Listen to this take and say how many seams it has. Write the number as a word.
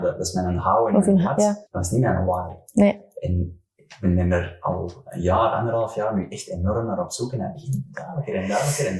one